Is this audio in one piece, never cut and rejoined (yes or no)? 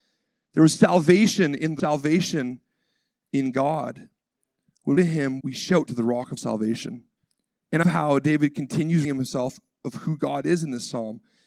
no